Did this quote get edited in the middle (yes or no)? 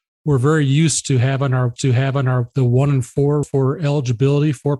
yes